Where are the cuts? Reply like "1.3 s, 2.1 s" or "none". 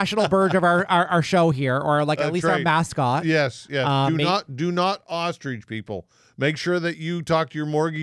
none

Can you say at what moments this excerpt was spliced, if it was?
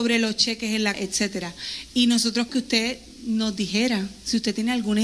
0.9 s, 2.5 s

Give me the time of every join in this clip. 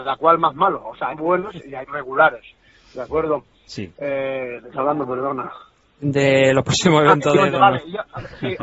1.1 s, 1.8 s, 4.7 s, 7.4 s

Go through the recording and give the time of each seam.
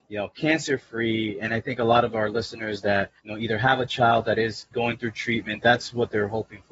3.2 s, 4.7 s

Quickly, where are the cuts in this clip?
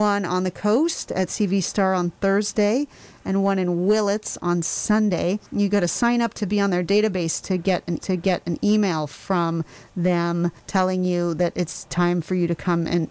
5.5 s, 8.0 s, 10.6 s

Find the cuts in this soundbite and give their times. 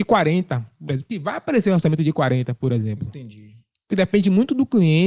3.9 s

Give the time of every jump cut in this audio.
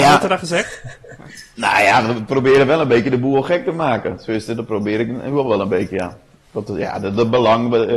none

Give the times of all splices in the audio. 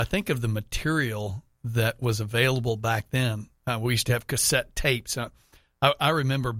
none

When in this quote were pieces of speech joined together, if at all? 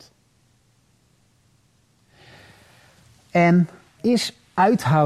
4.0 s

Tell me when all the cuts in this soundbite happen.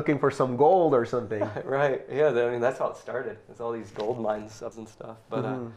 4.7 s

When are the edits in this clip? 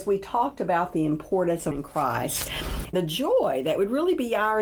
1.7 s, 2.9 s

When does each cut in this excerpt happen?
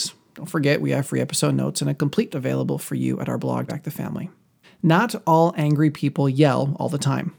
2.3 s, 3.7 s, 4.6 s

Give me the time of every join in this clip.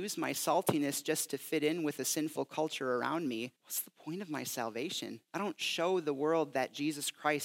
3.6 s, 5.2 s

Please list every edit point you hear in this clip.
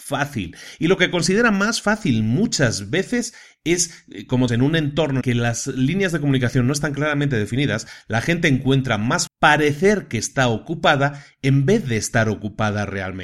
4.5 s, 5.2 s, 9.3 s

